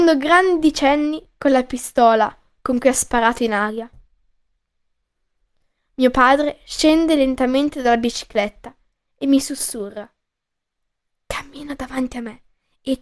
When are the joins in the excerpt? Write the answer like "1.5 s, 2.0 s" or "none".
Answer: none